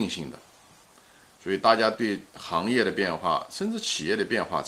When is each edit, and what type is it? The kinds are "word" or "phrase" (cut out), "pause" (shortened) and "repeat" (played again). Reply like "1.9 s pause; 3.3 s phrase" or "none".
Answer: 2.3 s pause